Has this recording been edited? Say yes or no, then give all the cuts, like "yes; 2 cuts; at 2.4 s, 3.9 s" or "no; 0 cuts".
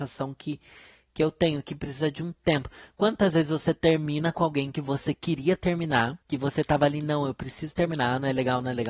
yes; 1 cut; at 6.2 s